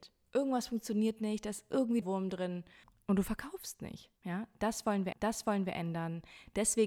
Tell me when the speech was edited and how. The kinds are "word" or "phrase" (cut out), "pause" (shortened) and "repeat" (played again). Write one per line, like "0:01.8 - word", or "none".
0:02.0 - word
0:04.2 - pause
0:05.1 - repeat